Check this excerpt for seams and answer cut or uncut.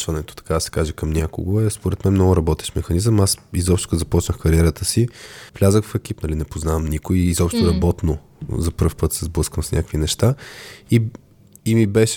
cut